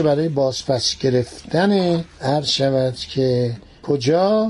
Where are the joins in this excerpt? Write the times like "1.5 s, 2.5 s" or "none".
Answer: none